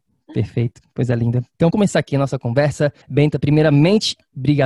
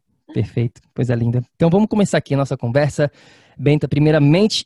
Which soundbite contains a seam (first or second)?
first